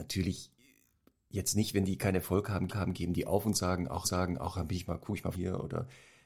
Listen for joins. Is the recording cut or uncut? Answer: cut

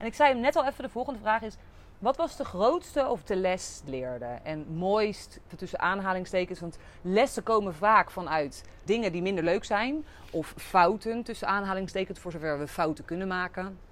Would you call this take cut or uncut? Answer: cut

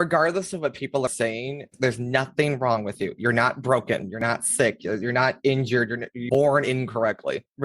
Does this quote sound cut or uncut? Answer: cut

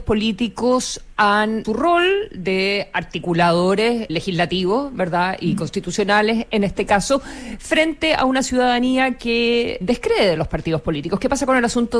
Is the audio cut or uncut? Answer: cut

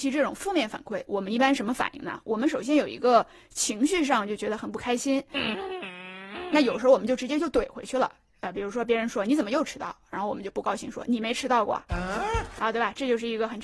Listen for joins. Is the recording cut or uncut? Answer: uncut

